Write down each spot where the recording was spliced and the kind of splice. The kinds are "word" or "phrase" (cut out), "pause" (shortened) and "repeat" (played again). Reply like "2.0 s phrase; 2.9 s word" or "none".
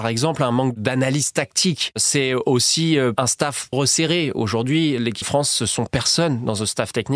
3.7 s word; 5.2 s word; 5.9 s word